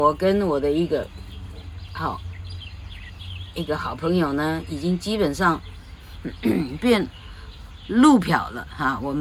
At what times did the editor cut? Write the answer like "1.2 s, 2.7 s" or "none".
none